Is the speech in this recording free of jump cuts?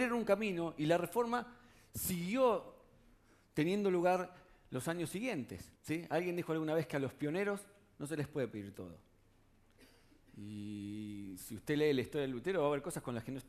no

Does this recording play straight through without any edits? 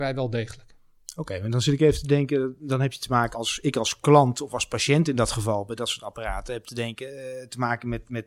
no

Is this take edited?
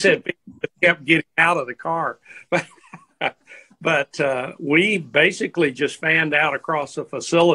no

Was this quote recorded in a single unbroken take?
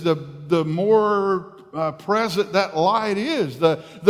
yes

